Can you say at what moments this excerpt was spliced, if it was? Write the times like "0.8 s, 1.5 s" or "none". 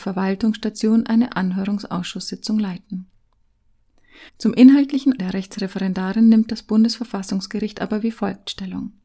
4.3 s, 5.2 s